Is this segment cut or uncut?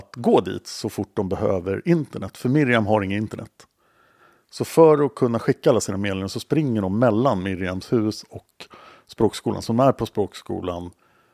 uncut